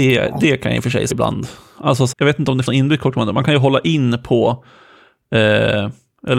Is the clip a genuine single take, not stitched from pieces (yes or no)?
no